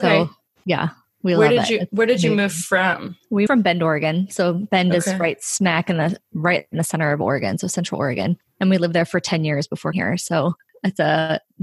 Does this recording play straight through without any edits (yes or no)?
no